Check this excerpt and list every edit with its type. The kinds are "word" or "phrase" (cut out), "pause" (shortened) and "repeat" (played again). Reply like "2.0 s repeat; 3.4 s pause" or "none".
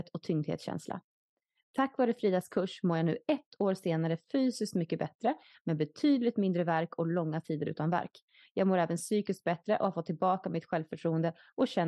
none